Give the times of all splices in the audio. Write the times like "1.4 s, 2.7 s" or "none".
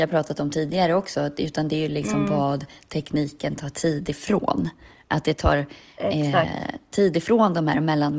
none